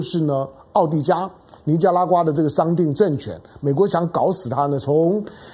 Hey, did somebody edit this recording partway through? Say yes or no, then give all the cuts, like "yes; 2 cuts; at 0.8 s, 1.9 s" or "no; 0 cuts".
no; 0 cuts